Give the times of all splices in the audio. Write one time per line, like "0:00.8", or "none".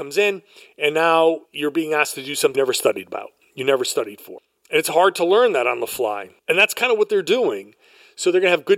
0:01.4
0:02.5
0:06.4